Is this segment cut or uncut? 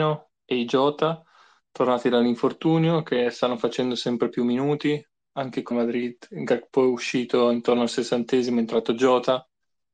cut